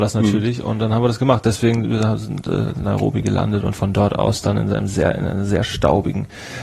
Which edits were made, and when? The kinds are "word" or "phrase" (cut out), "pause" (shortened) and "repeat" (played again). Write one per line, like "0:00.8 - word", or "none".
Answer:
none